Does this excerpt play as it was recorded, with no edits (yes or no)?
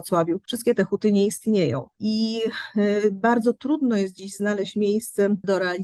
yes